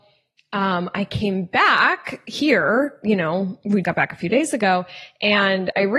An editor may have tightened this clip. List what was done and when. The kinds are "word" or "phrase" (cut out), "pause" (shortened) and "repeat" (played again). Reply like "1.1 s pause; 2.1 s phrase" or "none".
3.8 s word